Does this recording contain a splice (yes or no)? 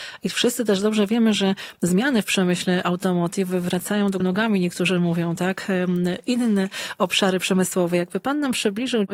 yes